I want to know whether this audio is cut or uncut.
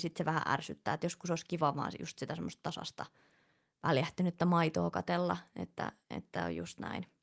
uncut